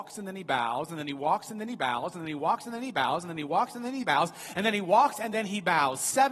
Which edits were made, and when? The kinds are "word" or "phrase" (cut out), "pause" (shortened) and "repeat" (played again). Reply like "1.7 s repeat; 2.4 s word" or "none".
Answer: none